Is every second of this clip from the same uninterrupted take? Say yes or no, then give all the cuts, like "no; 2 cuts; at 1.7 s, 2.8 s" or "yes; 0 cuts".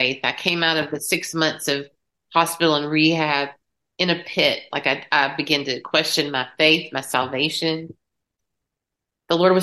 yes; 0 cuts